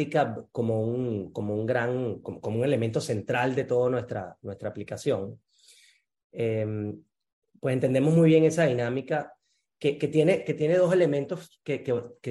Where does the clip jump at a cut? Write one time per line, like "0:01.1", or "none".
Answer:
none